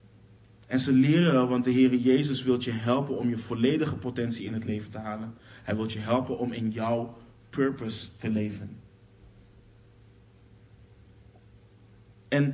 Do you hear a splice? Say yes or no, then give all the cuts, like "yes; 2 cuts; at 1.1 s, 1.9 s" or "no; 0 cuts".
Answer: no; 0 cuts